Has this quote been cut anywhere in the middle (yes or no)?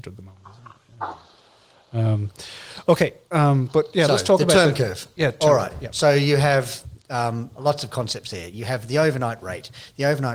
no